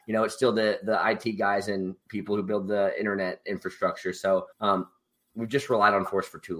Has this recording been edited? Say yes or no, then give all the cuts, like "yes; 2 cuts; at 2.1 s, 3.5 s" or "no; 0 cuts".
yes; 2 cuts; at 2.0 s, 4.5 s